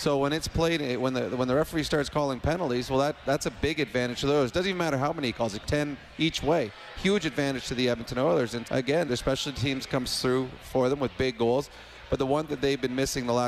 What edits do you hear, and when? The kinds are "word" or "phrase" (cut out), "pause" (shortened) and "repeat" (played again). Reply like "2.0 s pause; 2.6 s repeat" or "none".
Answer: 5.6 s word; 8.6 s word; 9.1 s word; 12.5 s word

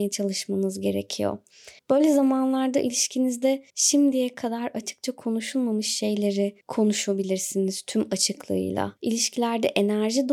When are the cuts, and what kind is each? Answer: 1.8 s pause; 3.7 s pause; 6.6 s pause; 9.0 s pause

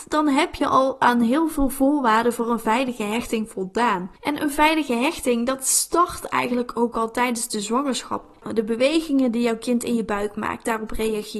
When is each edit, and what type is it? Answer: 4.2 s pause

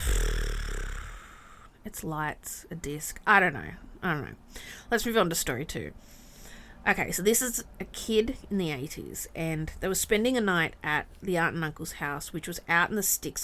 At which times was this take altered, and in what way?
none

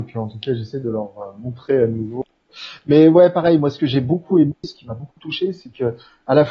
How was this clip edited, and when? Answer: none

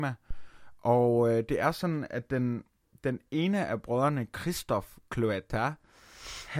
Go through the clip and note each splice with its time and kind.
none

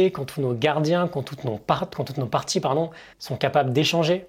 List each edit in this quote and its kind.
3.1 s pause

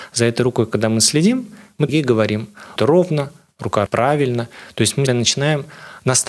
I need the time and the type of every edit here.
1.9 s phrase; 2.8 s phrase; 3.9 s word; 5.1 s word

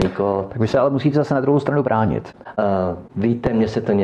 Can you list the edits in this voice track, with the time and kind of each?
none

